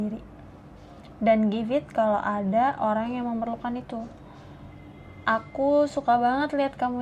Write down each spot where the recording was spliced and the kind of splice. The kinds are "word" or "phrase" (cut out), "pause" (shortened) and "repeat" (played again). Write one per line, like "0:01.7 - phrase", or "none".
none